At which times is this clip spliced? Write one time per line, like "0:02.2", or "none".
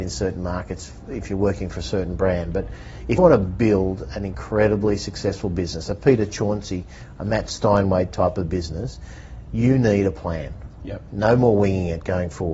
0:03.2